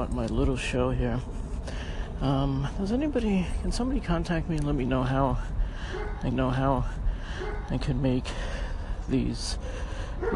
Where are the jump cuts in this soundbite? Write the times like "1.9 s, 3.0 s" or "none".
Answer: 6.3 s